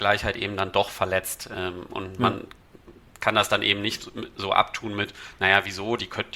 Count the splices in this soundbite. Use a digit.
0